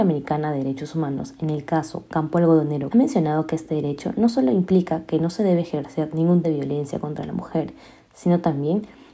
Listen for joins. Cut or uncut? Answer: cut